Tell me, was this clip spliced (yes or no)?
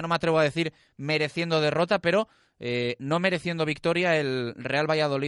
no